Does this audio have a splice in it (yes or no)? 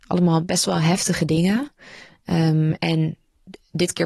no